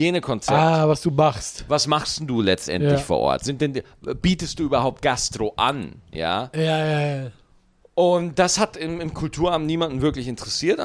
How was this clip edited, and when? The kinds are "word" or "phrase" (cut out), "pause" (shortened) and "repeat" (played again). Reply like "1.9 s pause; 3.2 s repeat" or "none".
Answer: none